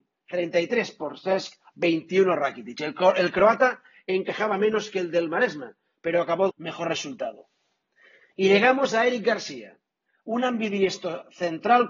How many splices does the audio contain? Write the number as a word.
one